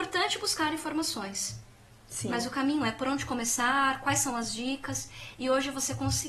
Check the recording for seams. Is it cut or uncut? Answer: uncut